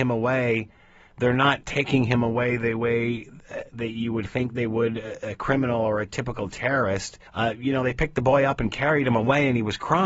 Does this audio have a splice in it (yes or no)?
yes